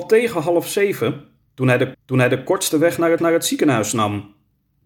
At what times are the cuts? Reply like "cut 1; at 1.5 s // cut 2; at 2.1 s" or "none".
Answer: cut 1; at 1.9 s // cut 2; at 3.2 s